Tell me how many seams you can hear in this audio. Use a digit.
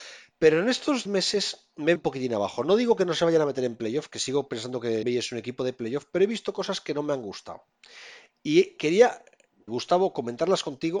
4